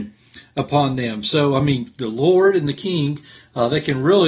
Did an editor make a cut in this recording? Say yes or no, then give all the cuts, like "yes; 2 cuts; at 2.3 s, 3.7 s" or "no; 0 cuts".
no; 0 cuts